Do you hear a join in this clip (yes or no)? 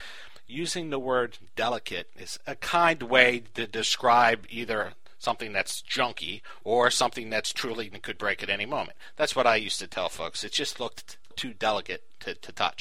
yes